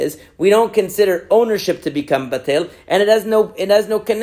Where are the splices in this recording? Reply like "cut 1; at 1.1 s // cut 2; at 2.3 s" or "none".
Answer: none

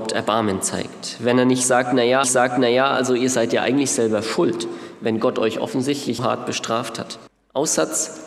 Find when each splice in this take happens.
cut 1; at 2.2 s // cut 2; at 6.2 s // cut 3; at 7.3 s

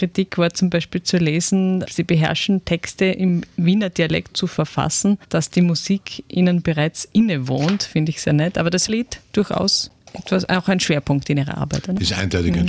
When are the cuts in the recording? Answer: cut 1; at 1.9 s // cut 2; at 4.3 s // cut 3; at 8.9 s

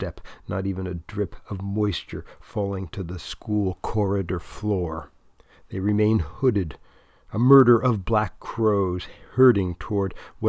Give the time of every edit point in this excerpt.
none

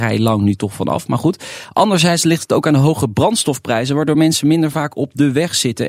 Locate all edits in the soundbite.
none

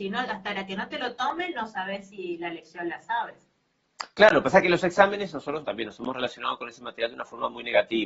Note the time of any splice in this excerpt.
cut 1; at 5.6 s

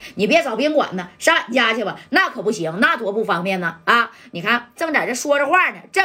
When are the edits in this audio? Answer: cut 1; at 4.8 s

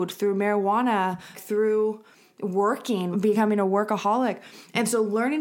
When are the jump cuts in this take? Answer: cut 1; at 1.3 s // cut 2; at 3.1 s

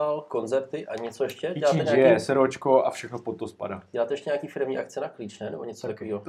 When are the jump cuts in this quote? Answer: none

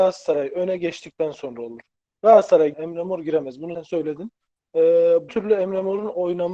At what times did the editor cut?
cut 1; at 2.7 s // cut 2; at 3.7 s // cut 3; at 5.3 s

